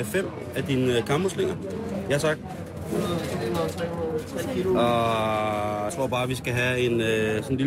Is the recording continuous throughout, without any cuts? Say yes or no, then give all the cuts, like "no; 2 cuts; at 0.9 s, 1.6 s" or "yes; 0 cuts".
no; 1 cut; at 5.9 s